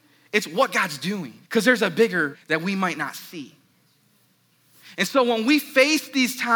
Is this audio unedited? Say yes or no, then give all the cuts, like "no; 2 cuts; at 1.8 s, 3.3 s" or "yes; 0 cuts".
no; 2 cuts; at 1.4 s, 2.3 s